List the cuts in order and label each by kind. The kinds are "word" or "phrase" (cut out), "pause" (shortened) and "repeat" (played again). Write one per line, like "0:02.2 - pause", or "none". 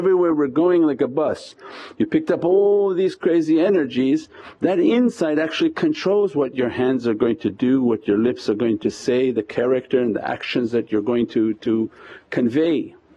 none